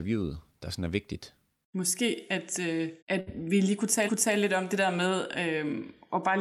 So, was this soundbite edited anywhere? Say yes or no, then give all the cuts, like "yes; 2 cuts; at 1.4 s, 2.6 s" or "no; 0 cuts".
yes; 2 cuts; at 3.0 s, 4.1 s